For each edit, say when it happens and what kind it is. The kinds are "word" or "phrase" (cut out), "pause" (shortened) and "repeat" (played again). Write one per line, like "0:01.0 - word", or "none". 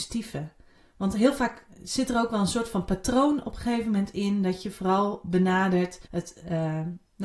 0:06.0 - pause